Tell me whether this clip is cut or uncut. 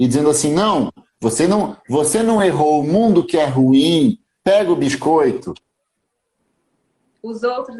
uncut